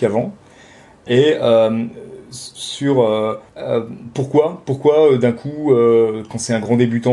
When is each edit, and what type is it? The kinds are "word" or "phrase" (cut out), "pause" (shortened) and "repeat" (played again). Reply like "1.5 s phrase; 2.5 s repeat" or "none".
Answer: 3.5 s pause